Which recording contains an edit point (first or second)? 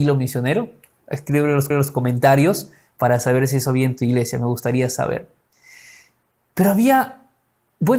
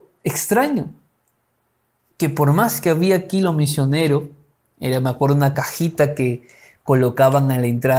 first